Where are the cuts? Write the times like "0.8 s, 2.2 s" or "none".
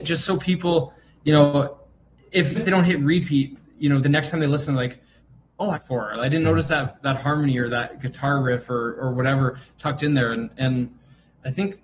2.5 s, 4.0 s, 5.7 s

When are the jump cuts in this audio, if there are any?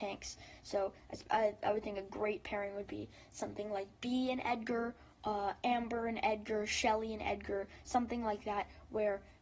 none

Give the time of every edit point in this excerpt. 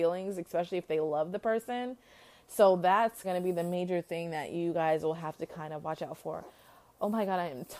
3.2 s

